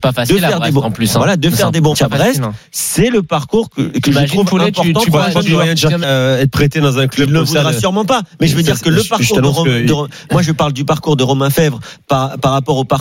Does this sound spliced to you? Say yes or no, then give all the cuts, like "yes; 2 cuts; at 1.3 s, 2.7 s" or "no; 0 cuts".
yes; 2 cuts; at 1.9 s, 6.0 s